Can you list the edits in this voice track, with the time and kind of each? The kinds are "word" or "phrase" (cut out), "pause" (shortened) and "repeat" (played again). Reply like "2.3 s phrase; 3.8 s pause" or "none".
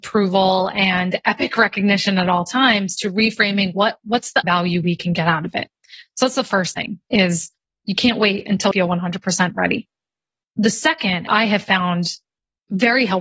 4.4 s word; 8.7 s word; 11.3 s phrase